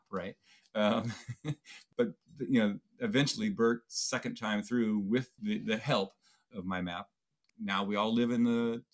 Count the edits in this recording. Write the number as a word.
zero